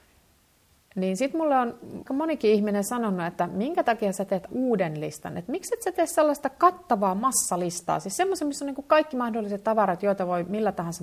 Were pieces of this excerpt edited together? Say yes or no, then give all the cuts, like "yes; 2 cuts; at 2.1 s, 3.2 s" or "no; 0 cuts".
yes; 2 cuts; at 2.1 s, 4.5 s